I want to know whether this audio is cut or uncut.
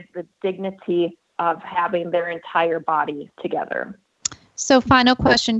cut